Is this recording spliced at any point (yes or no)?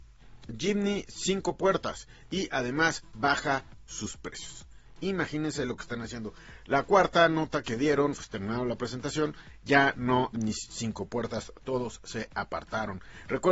yes